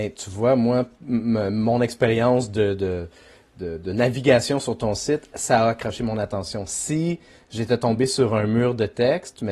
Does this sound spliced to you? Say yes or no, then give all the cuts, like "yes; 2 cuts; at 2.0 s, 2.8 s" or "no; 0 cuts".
no; 0 cuts